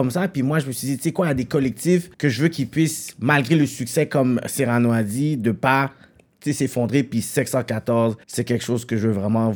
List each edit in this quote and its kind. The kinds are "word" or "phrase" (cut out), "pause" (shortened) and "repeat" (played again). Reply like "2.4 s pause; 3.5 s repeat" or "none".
2.1 s pause; 8.2 s pause